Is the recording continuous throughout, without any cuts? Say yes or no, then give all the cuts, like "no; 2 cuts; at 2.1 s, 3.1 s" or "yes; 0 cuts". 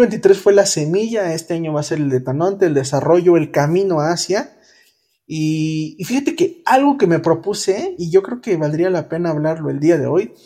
yes; 0 cuts